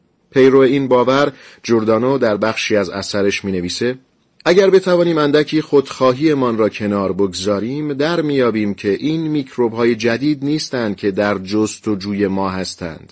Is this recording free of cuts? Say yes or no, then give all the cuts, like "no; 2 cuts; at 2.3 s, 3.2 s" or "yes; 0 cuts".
yes; 0 cuts